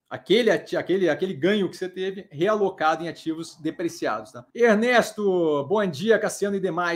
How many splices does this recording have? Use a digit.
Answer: 1